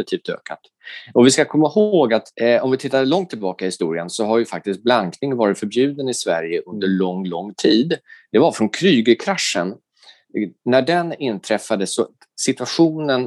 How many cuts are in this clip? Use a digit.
1